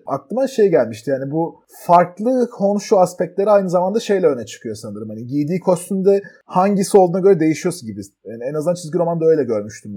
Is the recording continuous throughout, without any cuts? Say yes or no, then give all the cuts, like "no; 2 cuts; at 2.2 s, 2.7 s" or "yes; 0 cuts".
yes; 0 cuts